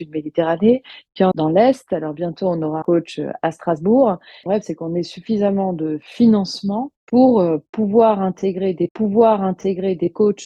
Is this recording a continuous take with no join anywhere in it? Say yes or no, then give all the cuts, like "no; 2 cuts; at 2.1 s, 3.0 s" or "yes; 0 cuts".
no; 5 cuts; at 1.3 s, 2.8 s, 4.5 s, 7.0 s, 8.9 s